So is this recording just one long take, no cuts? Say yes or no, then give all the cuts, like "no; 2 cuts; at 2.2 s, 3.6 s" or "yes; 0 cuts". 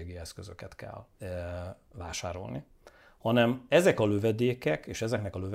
no; 1 cut; at 1.1 s